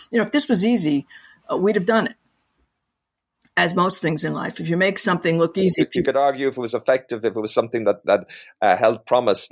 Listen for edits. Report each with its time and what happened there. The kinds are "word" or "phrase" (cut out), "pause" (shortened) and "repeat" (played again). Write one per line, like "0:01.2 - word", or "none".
none